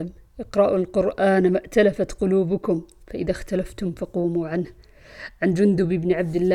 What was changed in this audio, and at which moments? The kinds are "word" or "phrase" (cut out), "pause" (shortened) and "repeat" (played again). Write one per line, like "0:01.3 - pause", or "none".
none